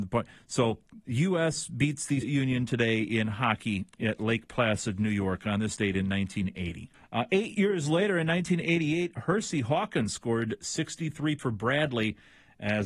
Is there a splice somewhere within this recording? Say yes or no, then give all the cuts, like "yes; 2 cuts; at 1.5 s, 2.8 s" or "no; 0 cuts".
yes; 4 cuts; at 2.2 s, 3.9 s, 6.9 s, 11.4 s